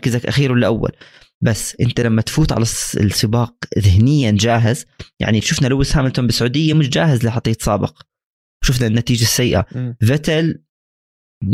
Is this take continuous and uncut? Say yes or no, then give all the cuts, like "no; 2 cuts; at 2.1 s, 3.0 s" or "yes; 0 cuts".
yes; 0 cuts